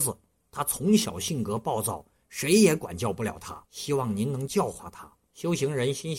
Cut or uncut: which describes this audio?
cut